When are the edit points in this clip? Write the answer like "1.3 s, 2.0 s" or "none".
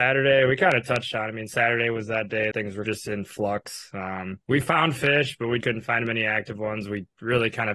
2.5 s, 2.9 s, 4.4 s, 5.6 s